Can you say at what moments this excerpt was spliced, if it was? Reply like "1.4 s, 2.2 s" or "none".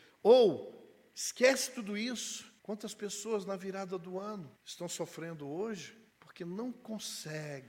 2.6 s, 4.6 s, 6.1 s